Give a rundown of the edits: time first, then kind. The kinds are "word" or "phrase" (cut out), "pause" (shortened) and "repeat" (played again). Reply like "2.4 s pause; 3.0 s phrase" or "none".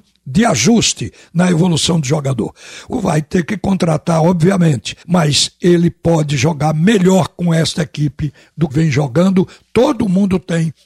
2.9 s word; 5.0 s pause; 8.7 s word